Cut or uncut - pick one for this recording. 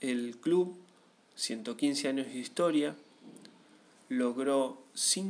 uncut